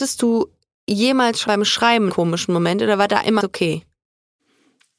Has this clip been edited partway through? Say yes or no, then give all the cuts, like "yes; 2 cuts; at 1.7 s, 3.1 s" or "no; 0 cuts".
yes; 3 cuts; at 1.5 s, 2.1 s, 3.4 s